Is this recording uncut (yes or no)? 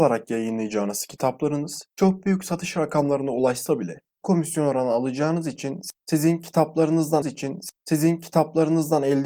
no